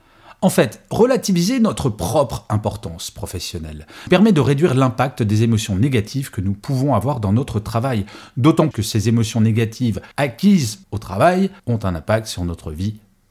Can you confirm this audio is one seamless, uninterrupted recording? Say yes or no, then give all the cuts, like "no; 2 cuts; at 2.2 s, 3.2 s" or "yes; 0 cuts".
no; 4 cuts; at 4.1 s, 8.7 s, 10.1 s, 11.6 s